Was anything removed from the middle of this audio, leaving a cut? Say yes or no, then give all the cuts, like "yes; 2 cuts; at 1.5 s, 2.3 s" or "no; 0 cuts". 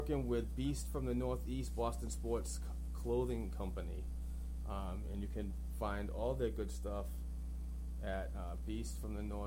no; 0 cuts